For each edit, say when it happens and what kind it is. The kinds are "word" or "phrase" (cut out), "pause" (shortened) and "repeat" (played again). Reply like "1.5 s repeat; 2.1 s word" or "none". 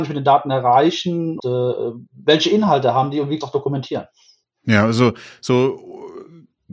1.4 s word; 2.1 s pause; 3.4 s phrase